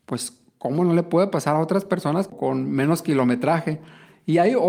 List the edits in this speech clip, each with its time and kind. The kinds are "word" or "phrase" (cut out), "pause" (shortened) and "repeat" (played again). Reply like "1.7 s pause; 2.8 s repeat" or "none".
none